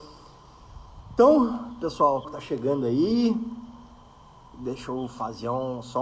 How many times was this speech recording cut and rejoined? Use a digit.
1